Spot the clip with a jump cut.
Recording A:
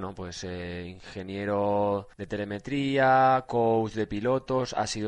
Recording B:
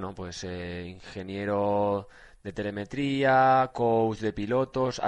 A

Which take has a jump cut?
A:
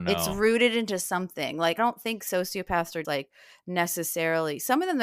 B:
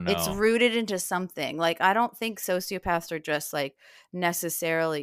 A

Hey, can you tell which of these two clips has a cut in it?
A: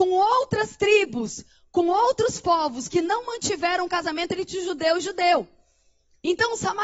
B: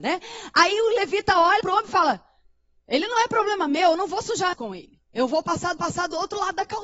B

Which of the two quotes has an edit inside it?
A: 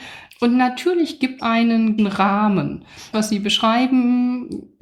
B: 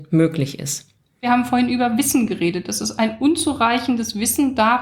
A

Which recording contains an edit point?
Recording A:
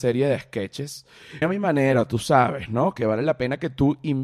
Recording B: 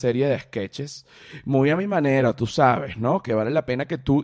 A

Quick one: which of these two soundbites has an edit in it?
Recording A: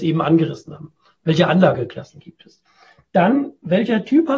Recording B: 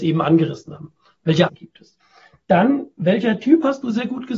B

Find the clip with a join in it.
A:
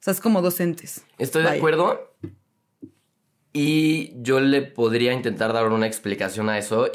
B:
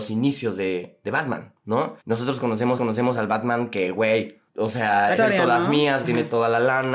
B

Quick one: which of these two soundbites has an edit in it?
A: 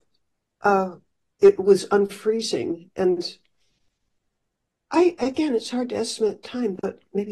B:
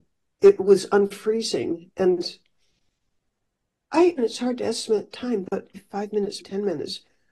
B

